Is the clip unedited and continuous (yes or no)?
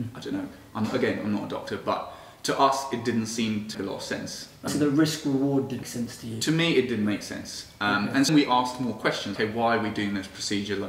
no